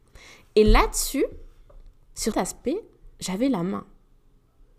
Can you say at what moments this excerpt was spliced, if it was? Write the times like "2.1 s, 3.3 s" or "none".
2.3 s, 3.1 s